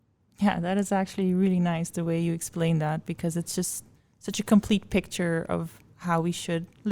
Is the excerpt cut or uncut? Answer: uncut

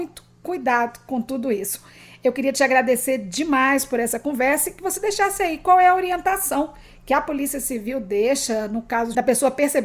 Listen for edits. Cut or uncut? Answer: uncut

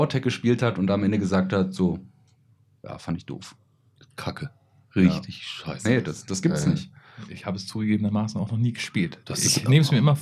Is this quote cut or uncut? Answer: uncut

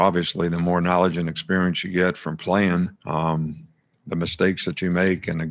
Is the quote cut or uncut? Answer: cut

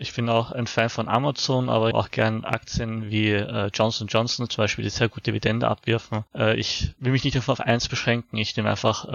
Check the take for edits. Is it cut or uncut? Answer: cut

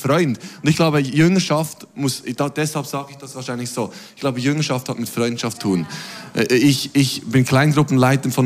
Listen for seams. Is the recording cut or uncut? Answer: cut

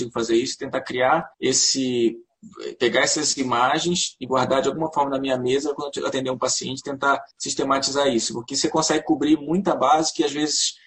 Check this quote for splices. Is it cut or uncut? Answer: cut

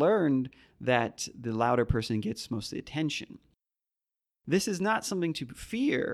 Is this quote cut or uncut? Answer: uncut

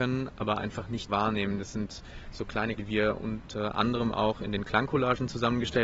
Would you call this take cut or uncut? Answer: cut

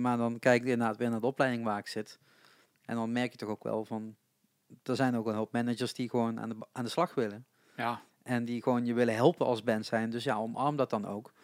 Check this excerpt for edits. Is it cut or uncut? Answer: uncut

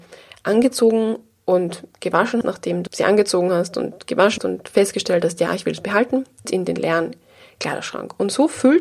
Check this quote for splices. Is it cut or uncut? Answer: cut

